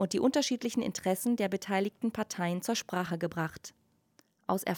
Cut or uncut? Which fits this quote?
uncut